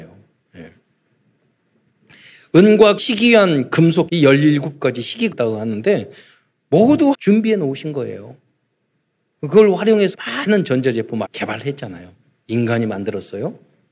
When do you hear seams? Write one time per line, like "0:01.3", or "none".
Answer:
0:03.0
0:04.1
0:05.3
0:07.1
0:10.1
0:11.2